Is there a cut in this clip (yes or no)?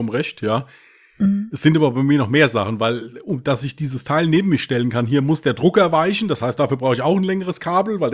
no